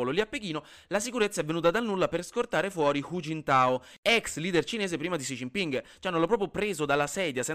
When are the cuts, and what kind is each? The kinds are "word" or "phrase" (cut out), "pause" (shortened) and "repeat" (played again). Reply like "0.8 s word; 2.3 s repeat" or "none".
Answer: none